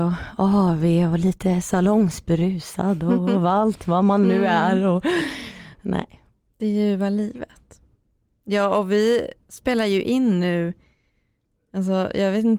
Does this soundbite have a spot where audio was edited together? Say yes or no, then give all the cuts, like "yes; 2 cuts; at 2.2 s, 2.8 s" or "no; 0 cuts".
no; 0 cuts